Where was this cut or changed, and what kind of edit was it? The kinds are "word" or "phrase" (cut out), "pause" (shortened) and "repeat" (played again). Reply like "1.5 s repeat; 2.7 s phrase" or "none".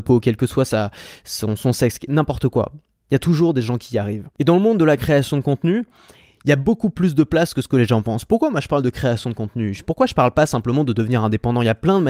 none

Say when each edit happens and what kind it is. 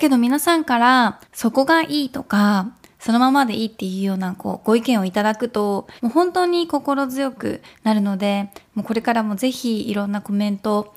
1.2 s pause; 6.0 s pause

